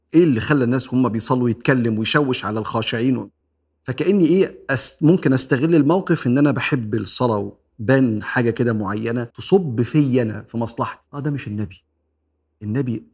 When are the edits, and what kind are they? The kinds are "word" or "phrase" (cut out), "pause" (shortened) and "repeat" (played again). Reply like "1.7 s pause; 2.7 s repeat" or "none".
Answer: 3.4 s pause; 9.3 s pause; 11.1 s pause

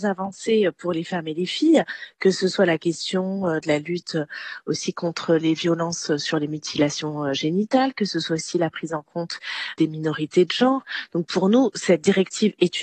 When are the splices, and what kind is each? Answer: none

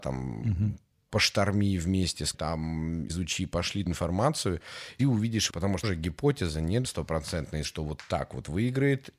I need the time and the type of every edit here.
2.3 s word; 3.1 s word; 3.9 s word; 5.0 s word; 5.5 s word; 5.8 s word; 6.8 s word; 7.6 s word

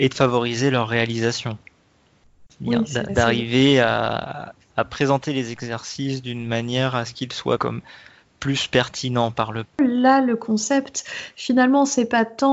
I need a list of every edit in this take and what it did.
3.1 s word; 4.7 s word; 7.6 s word; 9.6 s word

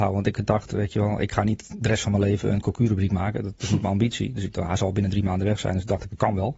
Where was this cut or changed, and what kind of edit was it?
none

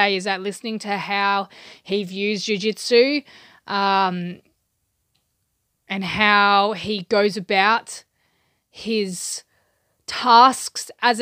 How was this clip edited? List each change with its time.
none

